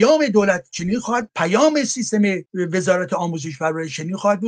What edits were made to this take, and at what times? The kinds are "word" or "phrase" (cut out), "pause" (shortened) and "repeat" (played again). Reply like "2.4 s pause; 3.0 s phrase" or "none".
1.3 s word; 2.5 s pause